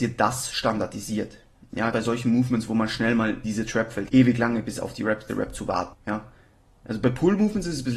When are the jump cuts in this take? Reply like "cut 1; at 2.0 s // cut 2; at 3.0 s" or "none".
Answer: cut 1; at 1.9 s // cut 2; at 3.4 s // cut 3; at 4.1 s // cut 4; at 5.3 s // cut 5; at 5.9 s